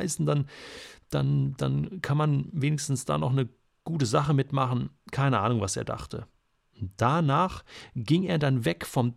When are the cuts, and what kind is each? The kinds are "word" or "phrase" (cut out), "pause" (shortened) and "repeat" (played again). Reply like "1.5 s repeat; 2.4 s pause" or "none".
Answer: none